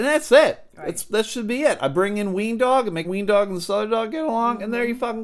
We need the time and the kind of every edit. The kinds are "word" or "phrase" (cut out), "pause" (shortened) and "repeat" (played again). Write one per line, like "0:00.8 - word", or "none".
0:03.0 - word